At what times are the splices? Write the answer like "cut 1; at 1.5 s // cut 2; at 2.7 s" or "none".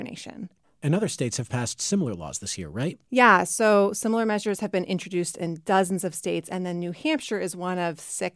cut 1; at 3.1 s